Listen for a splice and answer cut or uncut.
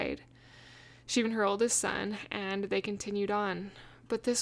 cut